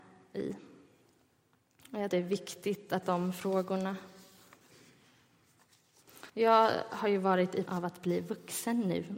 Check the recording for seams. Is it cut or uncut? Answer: cut